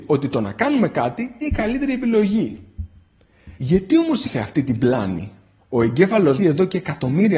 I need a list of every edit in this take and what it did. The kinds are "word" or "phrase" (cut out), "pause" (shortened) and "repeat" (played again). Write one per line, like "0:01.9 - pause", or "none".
0:01.4 - word
0:03.5 - pause
0:04.2 - word
0:05.6 - pause
0:06.4 - phrase